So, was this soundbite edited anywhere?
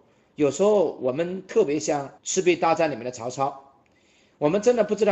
yes; 1 cut; at 2.2 s

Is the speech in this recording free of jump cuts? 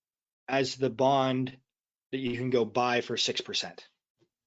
yes; 0 cuts

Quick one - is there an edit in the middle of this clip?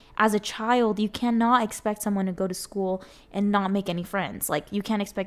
no; 0 cuts

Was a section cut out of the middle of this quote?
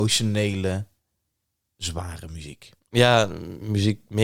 yes; 1 cut; at 2.8 s

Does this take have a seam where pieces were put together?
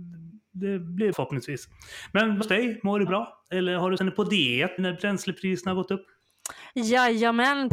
yes; 5 cuts; at 1.1 s, 2.4 s, 3.1 s, 4.0 s, 4.8 s

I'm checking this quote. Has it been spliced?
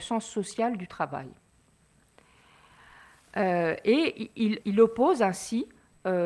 yes; 1 cut; at 4.6 s

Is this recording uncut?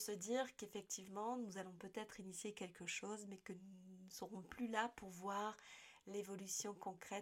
yes; 0 cuts

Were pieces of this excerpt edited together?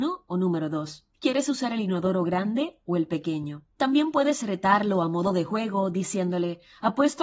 yes; 2 cuts; at 1.1 s, 3.7 s

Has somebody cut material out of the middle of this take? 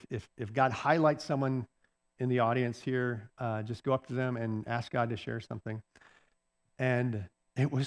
no; 0 cuts

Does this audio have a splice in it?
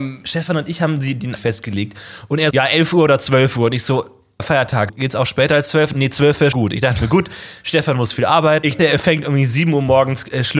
yes; 7 cuts; at 1.4 s, 2.5 s, 4.4 s, 4.9 s, 5.9 s, 6.5 s, 8.8 s

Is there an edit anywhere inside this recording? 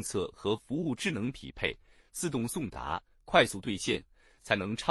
no; 0 cuts

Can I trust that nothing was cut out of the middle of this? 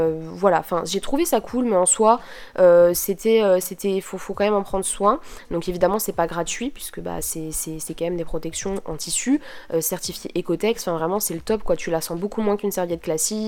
yes; 0 cuts

